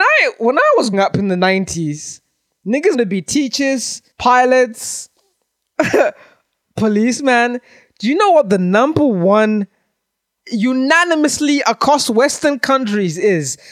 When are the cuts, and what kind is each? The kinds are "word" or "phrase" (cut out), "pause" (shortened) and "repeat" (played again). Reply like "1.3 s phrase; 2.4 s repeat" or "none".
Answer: 0.9 s word; 2.9 s word; 4.1 s pause; 10.4 s word